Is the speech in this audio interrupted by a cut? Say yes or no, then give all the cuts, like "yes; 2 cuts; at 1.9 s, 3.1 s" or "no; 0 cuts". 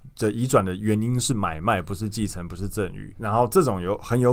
yes; 1 cut; at 3.2 s